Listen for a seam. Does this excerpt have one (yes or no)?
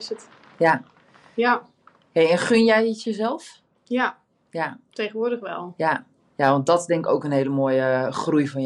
no